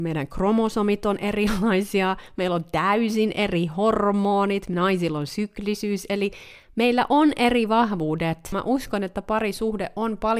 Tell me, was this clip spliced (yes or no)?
no